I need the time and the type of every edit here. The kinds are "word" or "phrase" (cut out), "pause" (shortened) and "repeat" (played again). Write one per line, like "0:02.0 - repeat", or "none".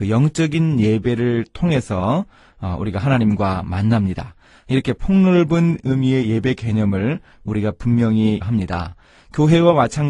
0:08.4 - word